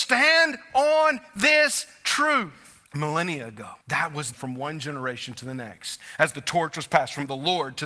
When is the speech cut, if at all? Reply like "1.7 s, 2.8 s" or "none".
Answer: 2.9 s, 3.8 s, 4.3 s

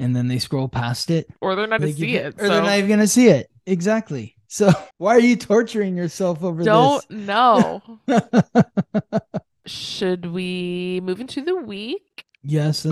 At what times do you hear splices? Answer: 1.8 s, 4.9 s

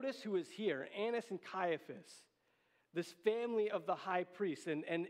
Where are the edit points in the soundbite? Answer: none

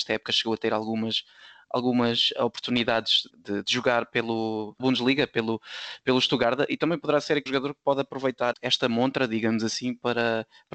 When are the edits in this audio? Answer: 3.3 s, 4.8 s, 7.5 s, 8.5 s

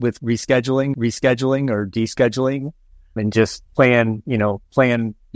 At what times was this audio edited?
0.9 s, 3.2 s, 3.7 s

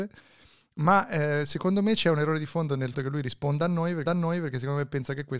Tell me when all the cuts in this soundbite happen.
2.9 s, 4.1 s

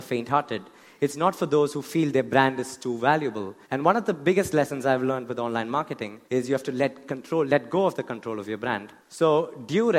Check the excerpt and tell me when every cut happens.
3.6 s, 6.3 s, 9.0 s

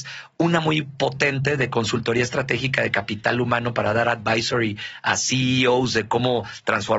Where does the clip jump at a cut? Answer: none

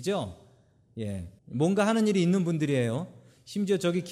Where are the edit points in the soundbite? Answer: 1.4 s

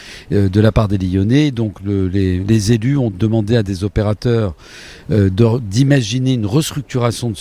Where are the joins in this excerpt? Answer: 2.4 s, 3.1 s

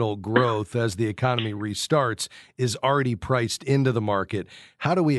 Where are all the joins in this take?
none

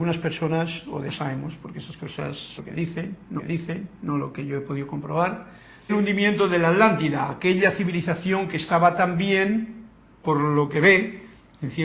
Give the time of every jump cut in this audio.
1.1 s, 2.6 s, 3.4 s, 5.9 s, 10.7 s

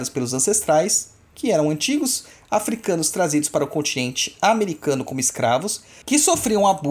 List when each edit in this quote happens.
none

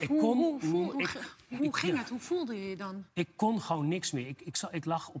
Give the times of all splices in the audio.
0.9 s, 1.6 s

